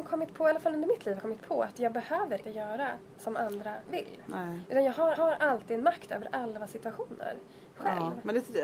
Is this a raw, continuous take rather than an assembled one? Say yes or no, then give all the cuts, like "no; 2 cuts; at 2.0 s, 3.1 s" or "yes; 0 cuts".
no; 4 cuts; at 1.2 s, 2.4 s, 3.9 s, 5.1 s